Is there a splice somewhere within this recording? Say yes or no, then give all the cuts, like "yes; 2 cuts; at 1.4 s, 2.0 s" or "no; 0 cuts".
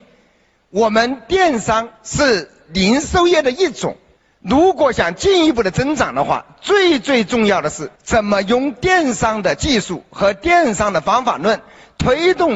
yes; 3 cuts; at 1.9 s, 4.2 s, 8.0 s